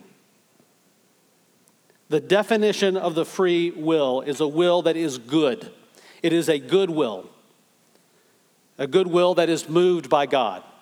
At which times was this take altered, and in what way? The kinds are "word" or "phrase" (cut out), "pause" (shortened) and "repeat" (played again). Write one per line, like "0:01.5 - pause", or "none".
none

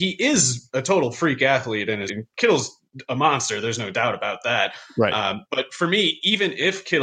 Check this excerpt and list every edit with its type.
0:02.1 - phrase

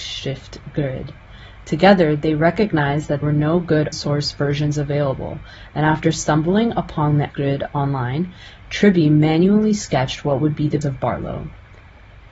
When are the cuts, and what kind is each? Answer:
0:03.2 - word
0:03.9 - word
0:07.3 - word
0:10.8 - word

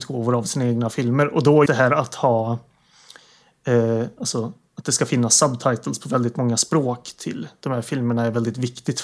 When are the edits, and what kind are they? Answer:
0:01.7 - word

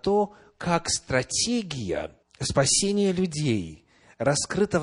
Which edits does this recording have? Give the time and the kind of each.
0:02.2 - pause

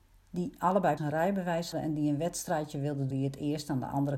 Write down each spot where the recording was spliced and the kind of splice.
0:01.0 - word
0:01.7 - word
0:03.1 - word

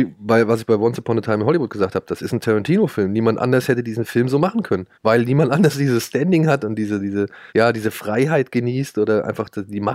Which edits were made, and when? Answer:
0:04.9 - pause
0:07.5 - pause

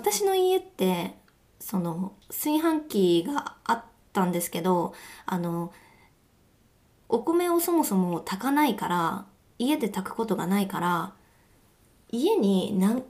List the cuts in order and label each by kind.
0:02.2 - pause

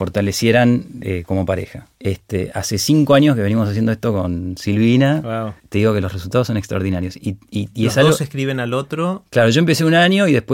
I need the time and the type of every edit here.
0:01.9 - pause
0:05.6 - pause

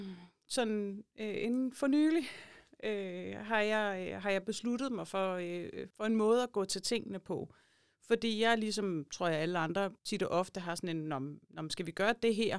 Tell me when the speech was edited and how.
0:05.9 - pause
0:10.0 - pause

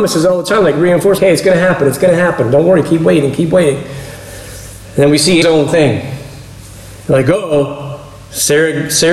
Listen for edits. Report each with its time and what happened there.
0:01.2 - word
0:05.4 - phrase

